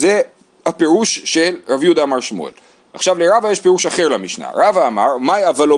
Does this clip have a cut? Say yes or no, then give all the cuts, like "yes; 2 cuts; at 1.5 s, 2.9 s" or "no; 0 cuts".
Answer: no; 0 cuts